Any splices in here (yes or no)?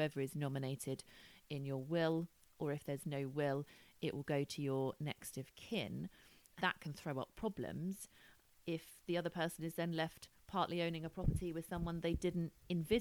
yes